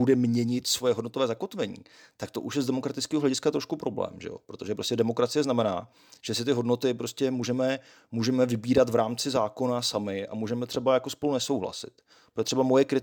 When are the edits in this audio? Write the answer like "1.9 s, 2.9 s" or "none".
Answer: none